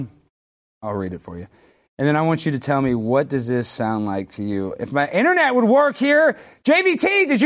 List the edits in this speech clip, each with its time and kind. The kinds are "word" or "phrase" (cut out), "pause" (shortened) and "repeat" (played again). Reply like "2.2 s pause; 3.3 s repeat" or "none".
none